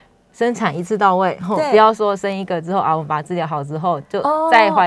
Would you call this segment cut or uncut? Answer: uncut